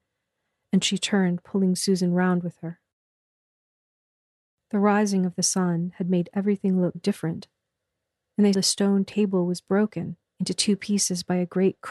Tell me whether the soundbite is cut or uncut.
cut